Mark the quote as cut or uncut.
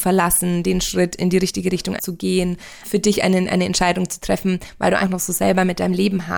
cut